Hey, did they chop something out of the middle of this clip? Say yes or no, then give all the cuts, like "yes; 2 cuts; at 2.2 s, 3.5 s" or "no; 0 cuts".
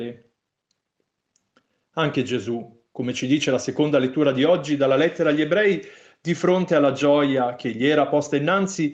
no; 0 cuts